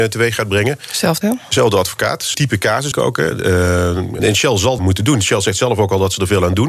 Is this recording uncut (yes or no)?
no